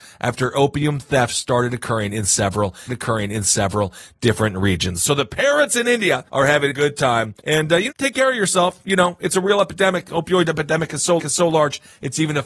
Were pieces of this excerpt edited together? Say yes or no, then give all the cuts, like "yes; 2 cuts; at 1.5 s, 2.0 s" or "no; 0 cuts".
yes; 6 cuts; at 2.9 s, 6.3 s, 6.7 s, 7.4 s, 7.9 s, 11.2 s